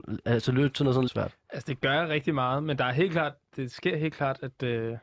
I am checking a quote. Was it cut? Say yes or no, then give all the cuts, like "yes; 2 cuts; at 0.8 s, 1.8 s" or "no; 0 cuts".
yes; 2 cuts; at 1.1 s, 3.5 s